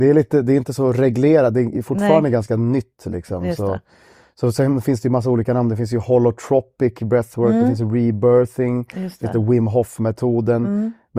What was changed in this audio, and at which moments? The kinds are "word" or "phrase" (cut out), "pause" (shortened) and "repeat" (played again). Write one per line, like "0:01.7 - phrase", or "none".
none

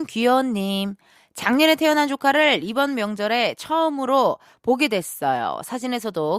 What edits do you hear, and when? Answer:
none

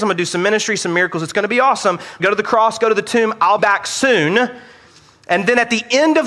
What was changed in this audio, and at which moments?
0:02.2 - word
0:03.6 - word

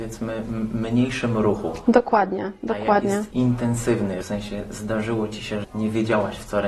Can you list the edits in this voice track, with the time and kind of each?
0:03.3 - word
0:04.2 - word
0:05.6 - word

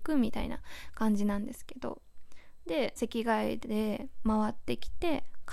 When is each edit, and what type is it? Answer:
0:03.0 - phrase

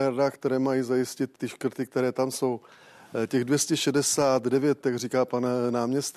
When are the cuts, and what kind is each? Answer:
0:01.4 - word
0:04.8 - word

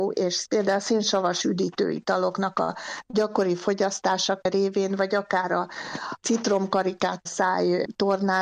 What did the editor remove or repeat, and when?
0:07.3 - phrase

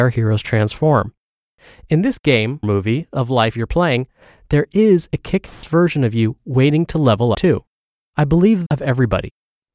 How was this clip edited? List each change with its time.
0:02.6 - word
0:07.3 - word
0:08.7 - word

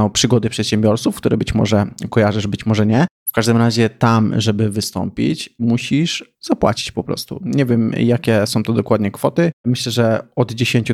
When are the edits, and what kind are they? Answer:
0:03.2 - pause
0:06.3 - pause
0:09.6 - pause

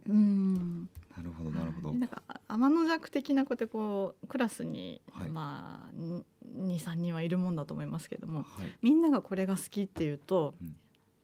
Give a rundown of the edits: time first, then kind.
0:01.1 - pause

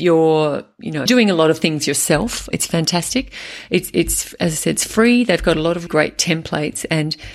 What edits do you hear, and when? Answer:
0:01.1 - phrase
0:02.5 - word
0:05.9 - word

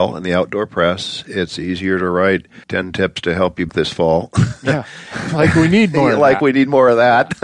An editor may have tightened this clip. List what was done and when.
0:02.6 - pause
0:03.7 - phrase

